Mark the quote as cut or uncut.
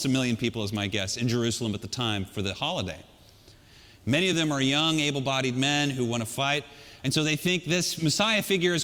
uncut